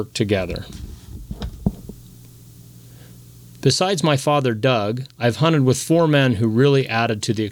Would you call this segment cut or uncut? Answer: uncut